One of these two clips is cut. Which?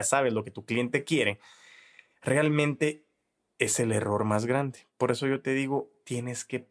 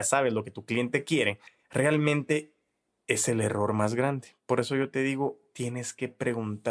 second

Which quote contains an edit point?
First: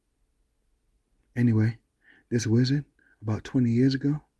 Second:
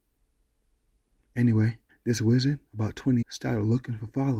second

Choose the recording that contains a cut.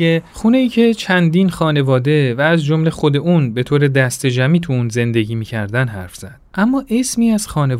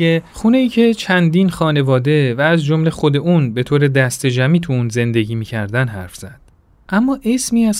first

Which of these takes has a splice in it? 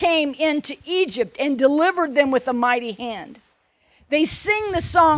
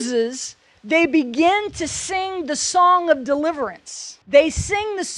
second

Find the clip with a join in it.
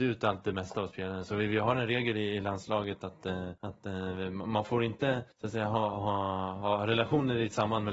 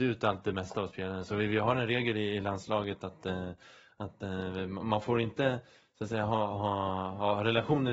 first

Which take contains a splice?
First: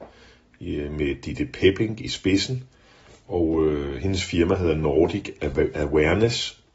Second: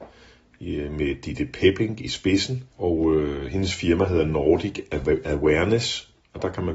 second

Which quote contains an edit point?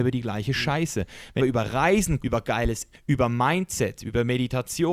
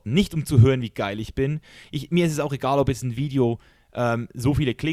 first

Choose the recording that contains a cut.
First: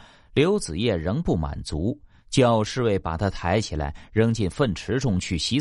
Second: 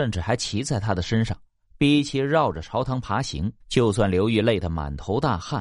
second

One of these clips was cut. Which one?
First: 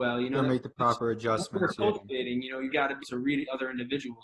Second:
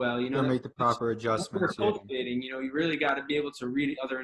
first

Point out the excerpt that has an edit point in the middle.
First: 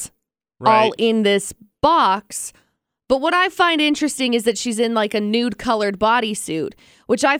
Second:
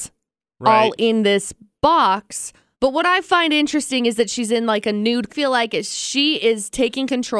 second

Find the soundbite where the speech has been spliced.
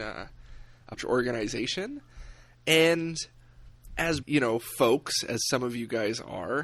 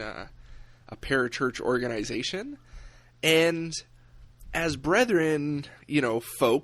first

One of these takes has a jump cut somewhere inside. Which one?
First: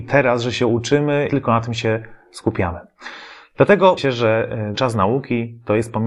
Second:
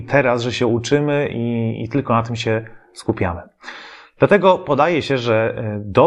first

